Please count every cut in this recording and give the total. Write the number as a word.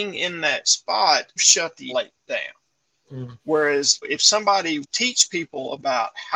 four